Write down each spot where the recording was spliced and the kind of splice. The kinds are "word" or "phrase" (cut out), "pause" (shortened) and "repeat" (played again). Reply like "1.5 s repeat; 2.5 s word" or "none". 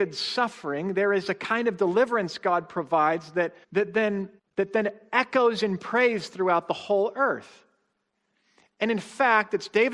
3.6 s pause; 4.4 s pause